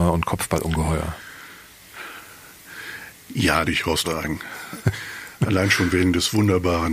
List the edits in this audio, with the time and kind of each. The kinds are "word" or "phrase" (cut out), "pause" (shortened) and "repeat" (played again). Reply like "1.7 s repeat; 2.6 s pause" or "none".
3.7 s phrase; 4.0 s word